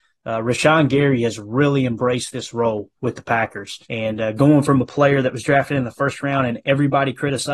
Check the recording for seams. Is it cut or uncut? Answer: cut